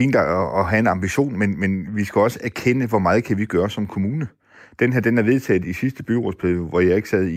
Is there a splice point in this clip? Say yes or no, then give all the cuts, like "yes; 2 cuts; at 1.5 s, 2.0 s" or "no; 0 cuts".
no; 0 cuts